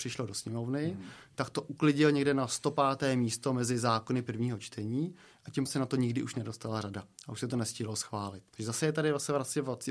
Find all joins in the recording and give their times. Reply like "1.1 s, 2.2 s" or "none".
5.7 s, 8.5 s